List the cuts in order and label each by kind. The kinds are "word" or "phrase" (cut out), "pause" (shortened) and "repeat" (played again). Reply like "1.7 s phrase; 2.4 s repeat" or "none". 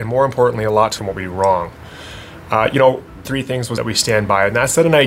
1.0 s phrase; 3.2 s phrase; 3.8 s phrase